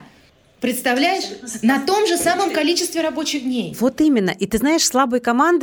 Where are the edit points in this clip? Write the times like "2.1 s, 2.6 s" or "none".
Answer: none